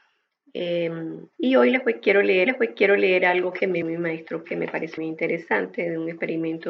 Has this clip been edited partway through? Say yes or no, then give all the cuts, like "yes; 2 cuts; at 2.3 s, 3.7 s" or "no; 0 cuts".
yes; 5 cuts; at 1.3 s, 2.5 s, 3.8 s, 4.4 s, 5.0 s